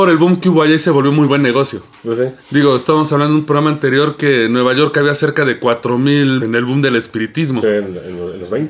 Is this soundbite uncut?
no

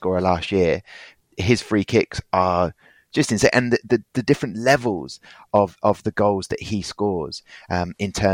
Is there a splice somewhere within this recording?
no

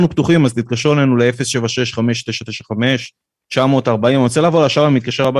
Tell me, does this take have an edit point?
no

